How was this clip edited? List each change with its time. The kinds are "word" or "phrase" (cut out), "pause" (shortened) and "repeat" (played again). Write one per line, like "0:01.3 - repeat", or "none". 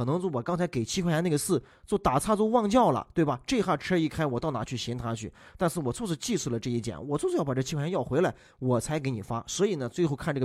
none